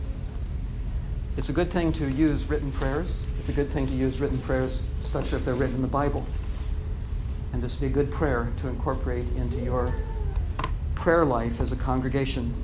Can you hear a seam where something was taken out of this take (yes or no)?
no